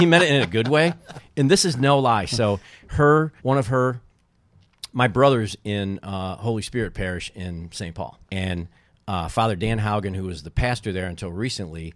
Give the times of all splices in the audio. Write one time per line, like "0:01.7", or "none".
0:03.4
0:08.2